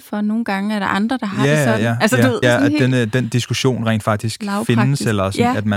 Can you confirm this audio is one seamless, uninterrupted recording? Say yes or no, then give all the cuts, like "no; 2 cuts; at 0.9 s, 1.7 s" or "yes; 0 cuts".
no; 1 cut; at 2.4 s